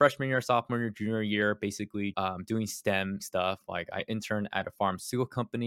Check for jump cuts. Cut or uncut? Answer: cut